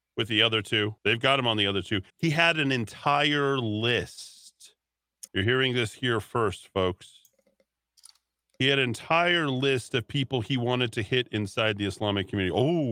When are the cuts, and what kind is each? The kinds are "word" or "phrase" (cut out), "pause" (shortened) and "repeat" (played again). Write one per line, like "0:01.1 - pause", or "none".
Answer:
0:01.0 - pause
0:02.1 - pause
0:05.3 - pause